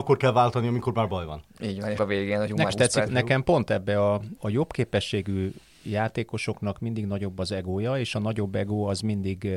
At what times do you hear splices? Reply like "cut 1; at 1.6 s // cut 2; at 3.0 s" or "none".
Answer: cut 1; at 2.0 s // cut 2; at 2.7 s // cut 3; at 3.1 s // cut 4; at 4.4 s